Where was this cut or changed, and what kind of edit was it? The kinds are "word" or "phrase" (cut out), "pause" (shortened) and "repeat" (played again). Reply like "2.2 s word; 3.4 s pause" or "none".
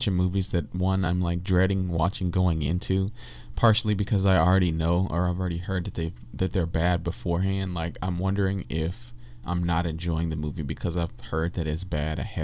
none